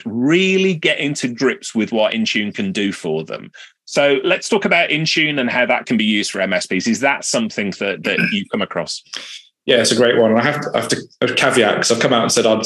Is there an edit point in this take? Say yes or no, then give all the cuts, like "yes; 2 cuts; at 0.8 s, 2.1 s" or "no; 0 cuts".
no; 0 cuts